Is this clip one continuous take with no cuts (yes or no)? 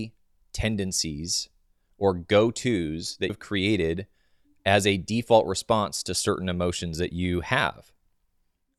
no